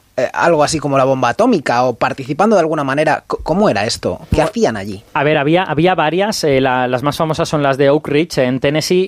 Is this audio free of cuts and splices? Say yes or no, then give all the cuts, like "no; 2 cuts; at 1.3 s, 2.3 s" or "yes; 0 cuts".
yes; 0 cuts